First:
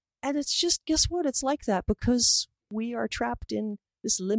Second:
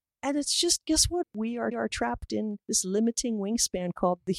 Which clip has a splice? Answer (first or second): second